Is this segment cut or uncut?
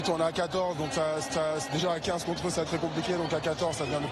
cut